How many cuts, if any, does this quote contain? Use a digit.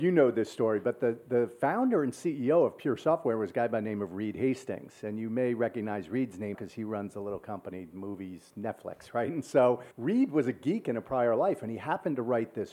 2